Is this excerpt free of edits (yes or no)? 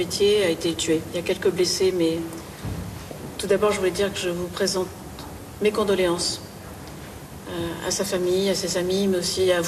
yes